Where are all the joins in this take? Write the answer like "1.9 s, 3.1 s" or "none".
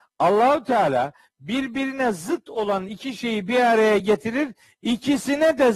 none

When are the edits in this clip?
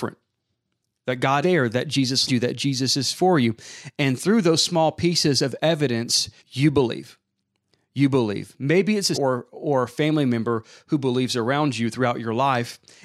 1.4 s, 2.3 s, 6.4 s, 9.1 s

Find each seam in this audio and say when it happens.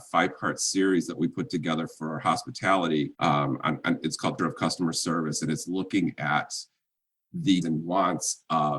3.1 s, 4.4 s, 7.6 s

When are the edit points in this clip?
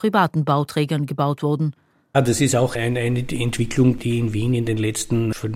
none

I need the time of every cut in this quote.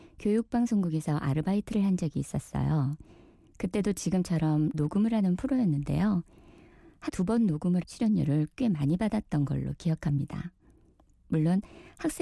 4.7 s, 7.1 s, 7.8 s

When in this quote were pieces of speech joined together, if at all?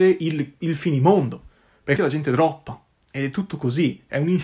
2.0 s

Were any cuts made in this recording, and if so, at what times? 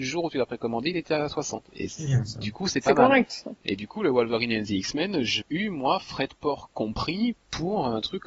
1.7 s, 5.4 s

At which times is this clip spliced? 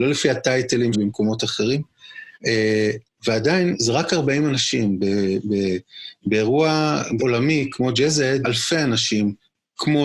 0.9 s, 2.4 s, 7.2 s, 8.4 s

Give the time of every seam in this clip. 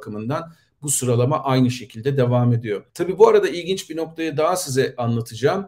2.9 s

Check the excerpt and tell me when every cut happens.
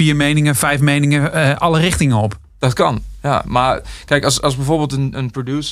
none

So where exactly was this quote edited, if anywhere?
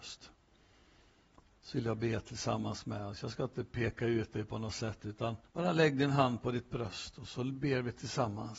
5.5 s

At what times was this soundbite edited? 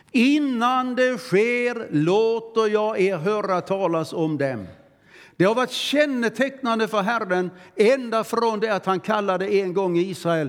none

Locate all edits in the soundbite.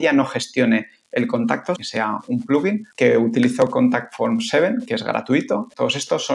1.8 s, 2.9 s

